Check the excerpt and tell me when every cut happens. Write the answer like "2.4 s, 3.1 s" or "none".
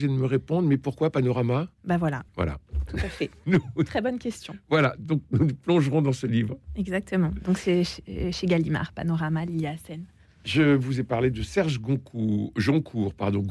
1.7 s, 2.3 s, 3.4 s